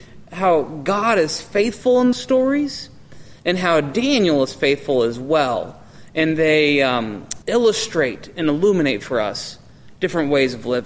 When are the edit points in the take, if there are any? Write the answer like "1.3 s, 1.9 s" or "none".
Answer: 2.1 s, 7.4 s

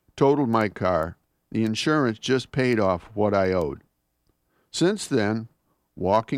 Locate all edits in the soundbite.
none

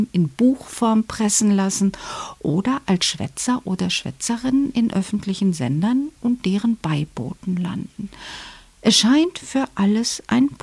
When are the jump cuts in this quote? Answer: none

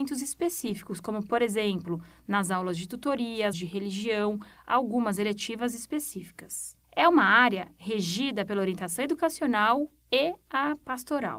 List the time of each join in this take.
3.5 s, 6.8 s

